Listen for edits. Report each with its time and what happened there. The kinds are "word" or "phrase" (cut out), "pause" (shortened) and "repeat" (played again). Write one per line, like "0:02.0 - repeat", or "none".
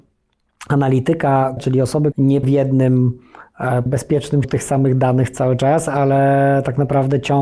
0:01.6 - word
0:02.1 - word
0:02.4 - word
0:03.9 - word
0:04.4 - word